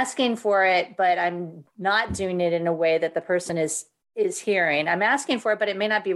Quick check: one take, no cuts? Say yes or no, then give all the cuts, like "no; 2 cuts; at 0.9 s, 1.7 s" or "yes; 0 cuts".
yes; 0 cuts